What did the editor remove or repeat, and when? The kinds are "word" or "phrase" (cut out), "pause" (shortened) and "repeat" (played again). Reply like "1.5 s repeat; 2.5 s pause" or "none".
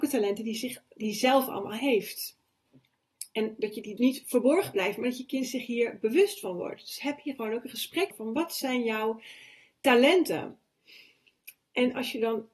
4.0 s word; 8.1 s word